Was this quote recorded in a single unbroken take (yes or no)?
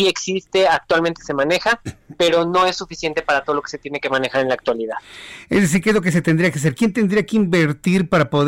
yes